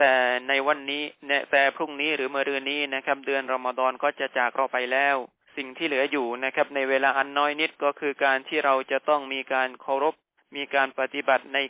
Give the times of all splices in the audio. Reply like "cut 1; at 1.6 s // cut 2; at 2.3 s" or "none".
cut 1; at 5.4 s // cut 2; at 10.4 s